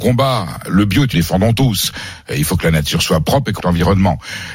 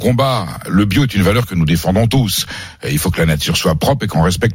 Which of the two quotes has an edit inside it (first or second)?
first